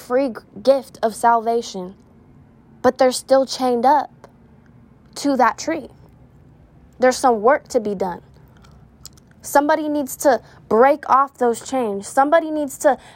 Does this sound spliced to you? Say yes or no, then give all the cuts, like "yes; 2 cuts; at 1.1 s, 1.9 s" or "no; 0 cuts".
no; 0 cuts